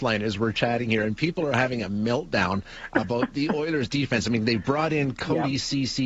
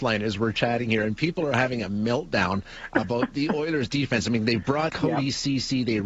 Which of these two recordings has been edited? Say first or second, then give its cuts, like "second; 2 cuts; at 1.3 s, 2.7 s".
second; 1 cut; at 4.9 s